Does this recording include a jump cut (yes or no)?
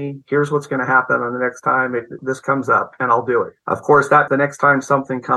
yes